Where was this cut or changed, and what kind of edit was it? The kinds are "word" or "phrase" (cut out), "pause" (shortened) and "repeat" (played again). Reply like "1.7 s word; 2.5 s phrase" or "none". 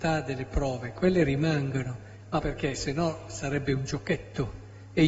2.4 s word